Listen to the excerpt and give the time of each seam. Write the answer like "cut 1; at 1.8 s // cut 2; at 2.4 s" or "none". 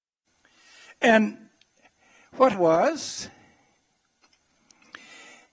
cut 1; at 2.5 s